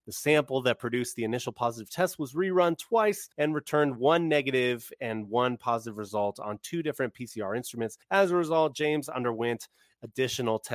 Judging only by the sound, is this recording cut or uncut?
cut